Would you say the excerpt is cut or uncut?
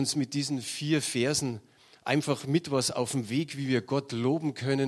uncut